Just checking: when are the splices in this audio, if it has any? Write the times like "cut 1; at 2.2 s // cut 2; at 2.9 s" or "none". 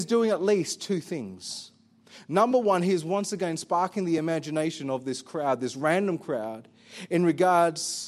none